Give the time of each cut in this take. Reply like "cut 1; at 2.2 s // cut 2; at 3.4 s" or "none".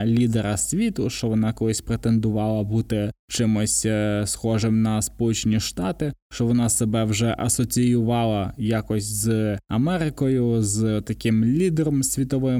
none